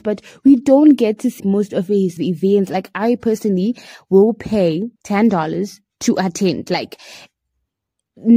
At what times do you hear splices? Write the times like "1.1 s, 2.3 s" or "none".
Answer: 1.4 s, 2.2 s, 4.9 s